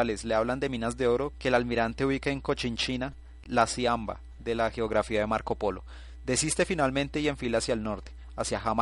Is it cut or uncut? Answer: uncut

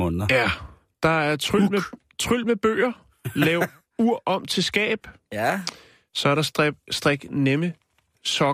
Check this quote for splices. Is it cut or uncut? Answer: uncut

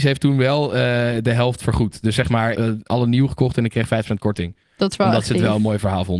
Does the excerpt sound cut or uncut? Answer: cut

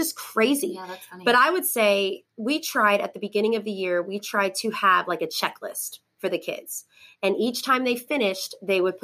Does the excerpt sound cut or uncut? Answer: uncut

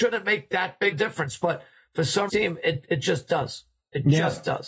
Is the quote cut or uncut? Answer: cut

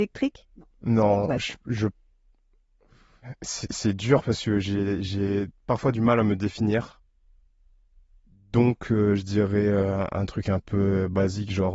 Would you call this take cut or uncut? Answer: uncut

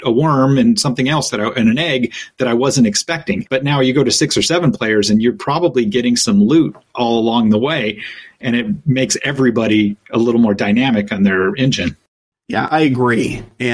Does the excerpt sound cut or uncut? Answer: uncut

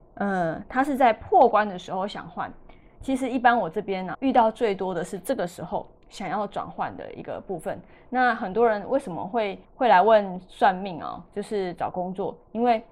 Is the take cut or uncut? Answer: cut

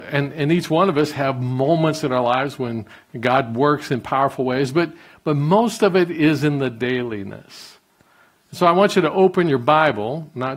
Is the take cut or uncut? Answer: uncut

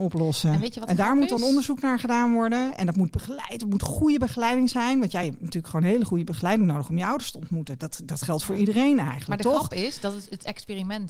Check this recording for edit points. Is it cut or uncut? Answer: uncut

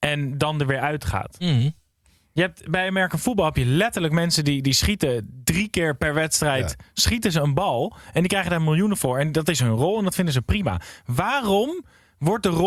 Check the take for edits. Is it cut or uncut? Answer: uncut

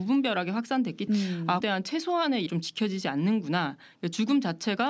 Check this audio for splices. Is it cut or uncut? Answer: cut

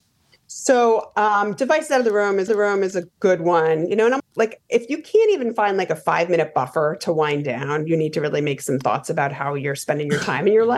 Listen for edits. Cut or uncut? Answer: cut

